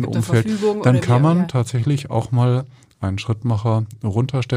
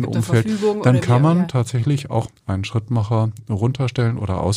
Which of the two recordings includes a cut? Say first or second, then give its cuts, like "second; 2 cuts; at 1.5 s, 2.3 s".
second; 1 cut; at 2.3 s